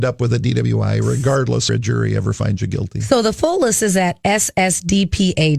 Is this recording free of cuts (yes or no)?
no